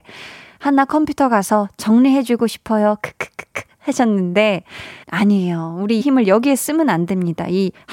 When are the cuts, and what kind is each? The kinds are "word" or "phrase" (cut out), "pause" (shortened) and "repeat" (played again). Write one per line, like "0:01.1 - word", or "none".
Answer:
0:05.0 - word
0:06.0 - phrase